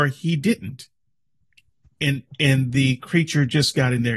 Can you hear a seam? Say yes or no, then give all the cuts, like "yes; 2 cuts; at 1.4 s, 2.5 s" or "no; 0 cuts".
no; 0 cuts